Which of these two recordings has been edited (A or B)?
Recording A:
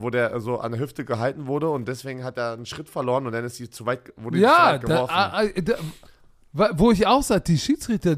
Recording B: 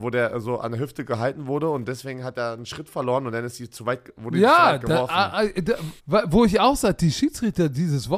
B